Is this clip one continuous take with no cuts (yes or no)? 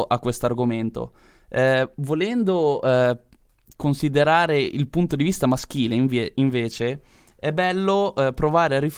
yes